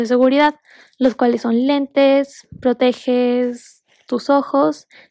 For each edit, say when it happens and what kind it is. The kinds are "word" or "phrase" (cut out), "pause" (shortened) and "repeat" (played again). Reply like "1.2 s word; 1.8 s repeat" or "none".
none